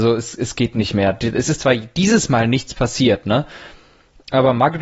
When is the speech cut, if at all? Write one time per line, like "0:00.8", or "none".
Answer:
none